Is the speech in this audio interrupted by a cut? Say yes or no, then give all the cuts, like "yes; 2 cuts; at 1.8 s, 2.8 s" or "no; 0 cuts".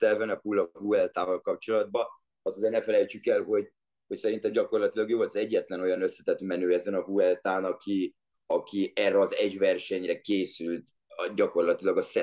no; 0 cuts